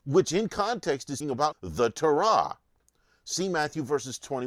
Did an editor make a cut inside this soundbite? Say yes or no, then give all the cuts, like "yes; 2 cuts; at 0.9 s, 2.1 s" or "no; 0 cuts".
yes; 2 cuts; at 1.2 s, 1.5 s